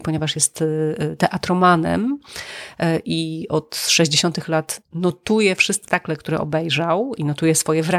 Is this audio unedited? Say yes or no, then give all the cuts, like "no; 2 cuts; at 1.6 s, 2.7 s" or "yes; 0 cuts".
no; 1 cut; at 5.9 s